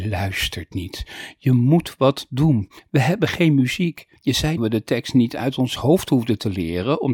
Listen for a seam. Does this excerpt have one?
yes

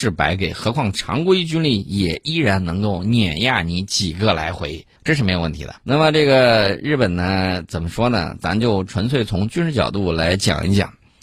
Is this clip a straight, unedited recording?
no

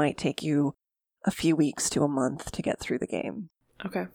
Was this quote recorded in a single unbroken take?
yes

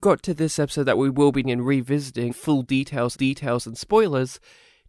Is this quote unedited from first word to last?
no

